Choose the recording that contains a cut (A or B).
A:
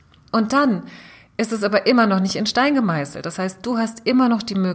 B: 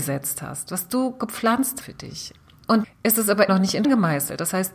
B